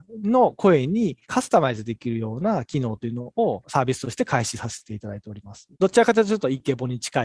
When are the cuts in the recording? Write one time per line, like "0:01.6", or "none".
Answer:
0:01.2
0:05.7